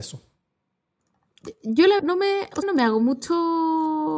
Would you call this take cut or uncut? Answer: cut